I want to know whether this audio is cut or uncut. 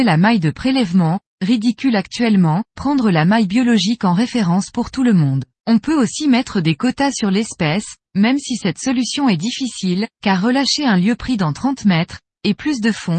cut